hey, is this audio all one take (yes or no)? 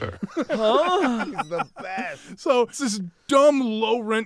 no